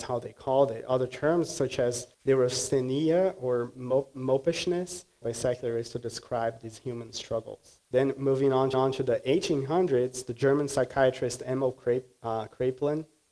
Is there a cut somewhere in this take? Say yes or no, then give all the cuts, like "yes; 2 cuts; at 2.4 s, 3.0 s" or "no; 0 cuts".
yes; 4 cuts; at 2.1 s, 5.2 s, 7.8 s, 8.7 s